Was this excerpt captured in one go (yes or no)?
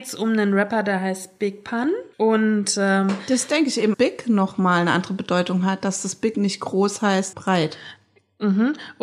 no